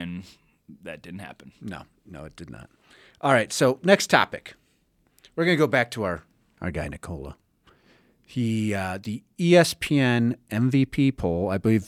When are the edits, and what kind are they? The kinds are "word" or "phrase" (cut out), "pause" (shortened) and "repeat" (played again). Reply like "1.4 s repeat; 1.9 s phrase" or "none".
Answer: none